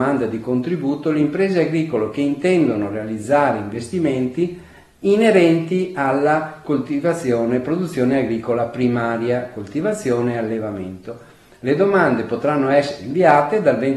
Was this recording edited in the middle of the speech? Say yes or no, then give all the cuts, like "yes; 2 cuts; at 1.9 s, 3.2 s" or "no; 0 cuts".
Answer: no; 0 cuts